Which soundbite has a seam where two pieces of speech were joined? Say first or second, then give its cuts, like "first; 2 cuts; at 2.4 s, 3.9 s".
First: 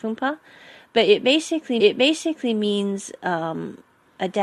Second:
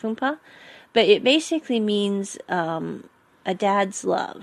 first; 1 cut; at 1.8 s